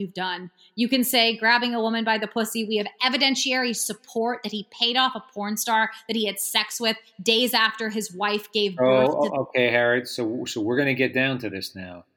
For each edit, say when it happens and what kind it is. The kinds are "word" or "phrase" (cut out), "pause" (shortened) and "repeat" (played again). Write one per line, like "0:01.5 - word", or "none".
none